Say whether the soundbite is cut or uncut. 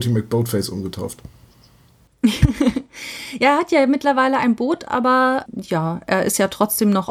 cut